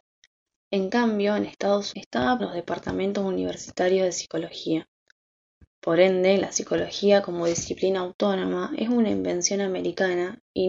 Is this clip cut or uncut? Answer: cut